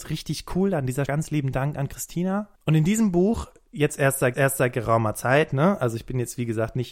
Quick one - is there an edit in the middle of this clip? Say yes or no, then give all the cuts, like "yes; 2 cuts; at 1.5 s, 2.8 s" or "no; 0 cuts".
yes; 3 cuts; at 1.1 s, 2.6 s, 4.3 s